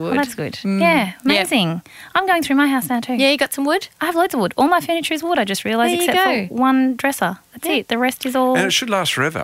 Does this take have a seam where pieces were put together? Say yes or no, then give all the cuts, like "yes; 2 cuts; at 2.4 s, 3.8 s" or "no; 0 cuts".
no; 0 cuts